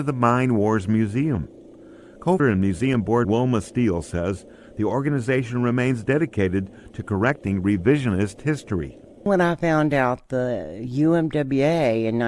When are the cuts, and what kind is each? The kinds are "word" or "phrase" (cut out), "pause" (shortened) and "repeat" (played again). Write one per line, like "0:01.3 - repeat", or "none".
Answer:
0:02.4 - word
0:03.2 - word